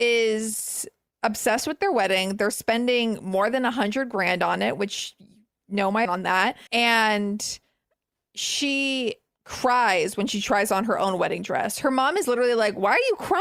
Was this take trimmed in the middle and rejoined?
yes; 2 cuts; at 6.1 s, 6.7 s

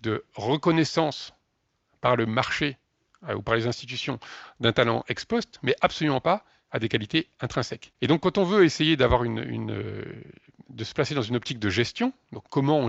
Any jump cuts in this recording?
yes; 1 cut; at 7.9 s

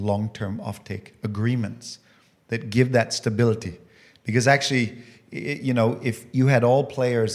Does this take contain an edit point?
no; 0 cuts

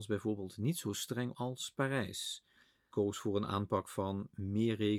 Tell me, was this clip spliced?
yes; 2 cuts; at 1.3 s, 2.9 s

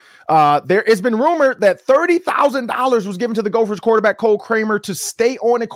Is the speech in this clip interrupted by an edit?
no; 0 cuts

